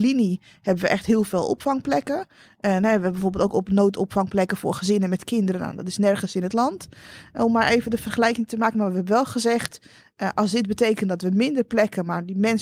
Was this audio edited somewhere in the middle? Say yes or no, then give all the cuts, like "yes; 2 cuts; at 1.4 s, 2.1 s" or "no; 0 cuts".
no; 0 cuts